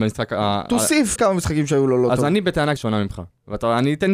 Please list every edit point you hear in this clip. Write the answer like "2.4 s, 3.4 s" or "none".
1.2 s, 2.8 s

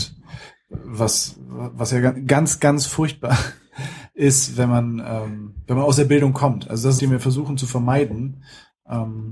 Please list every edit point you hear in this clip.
7.0 s

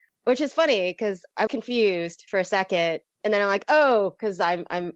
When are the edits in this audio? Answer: 1.5 s

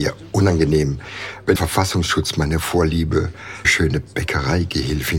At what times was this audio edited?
1.6 s, 3.6 s

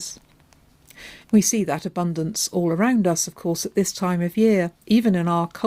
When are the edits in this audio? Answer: 1.2 s

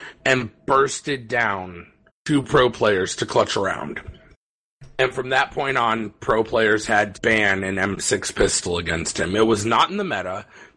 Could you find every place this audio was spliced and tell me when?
2.1 s, 7.1 s

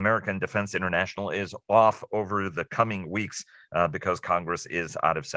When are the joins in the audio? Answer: none

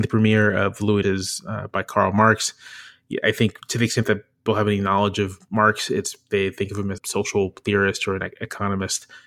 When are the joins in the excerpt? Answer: 1.0 s, 3.6 s, 4.5 s, 7.0 s

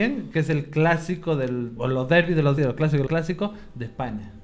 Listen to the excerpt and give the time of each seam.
1.8 s, 2.6 s, 3.1 s

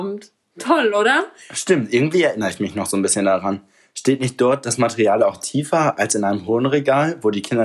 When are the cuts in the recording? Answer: none

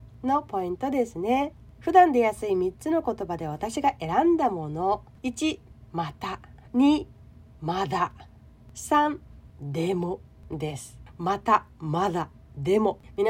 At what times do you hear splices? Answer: 6.6 s

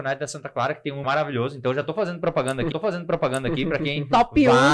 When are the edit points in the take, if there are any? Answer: 1.0 s, 2.7 s

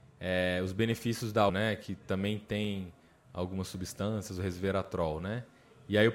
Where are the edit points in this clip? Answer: 1.5 s

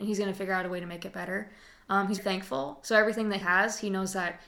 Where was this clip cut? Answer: 2.2 s, 3.4 s

